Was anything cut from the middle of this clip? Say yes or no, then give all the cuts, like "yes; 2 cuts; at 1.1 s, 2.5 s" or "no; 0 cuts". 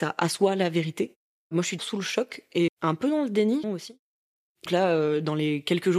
yes; 4 cuts; at 1.8 s, 2.7 s, 3.6 s, 4.7 s